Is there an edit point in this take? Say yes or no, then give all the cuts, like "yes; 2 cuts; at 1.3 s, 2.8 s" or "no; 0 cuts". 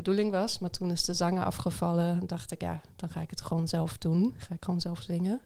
yes; 1 cut; at 2.3 s